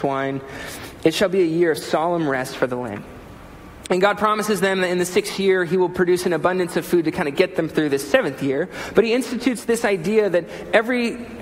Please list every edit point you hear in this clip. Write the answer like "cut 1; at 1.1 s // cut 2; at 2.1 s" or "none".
none